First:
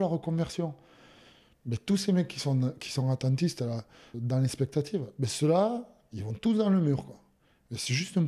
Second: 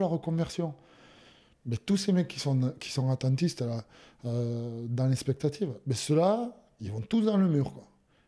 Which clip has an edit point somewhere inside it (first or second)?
first